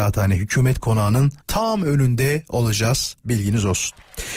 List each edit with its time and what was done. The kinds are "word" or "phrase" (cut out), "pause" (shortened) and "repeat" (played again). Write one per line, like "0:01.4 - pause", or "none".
0:01.4 - pause
0:03.2 - pause